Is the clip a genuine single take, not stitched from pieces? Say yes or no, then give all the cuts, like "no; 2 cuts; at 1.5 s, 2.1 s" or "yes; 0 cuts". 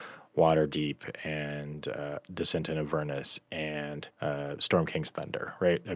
no; 1 cut; at 4.1 s